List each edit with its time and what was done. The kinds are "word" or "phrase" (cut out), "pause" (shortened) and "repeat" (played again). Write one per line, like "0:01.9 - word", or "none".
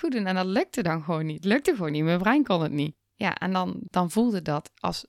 none